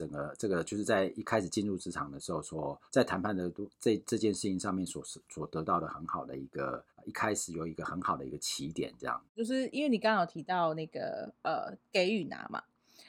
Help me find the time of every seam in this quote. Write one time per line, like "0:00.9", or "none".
0:02.9
0:03.7
0:06.9
0:09.3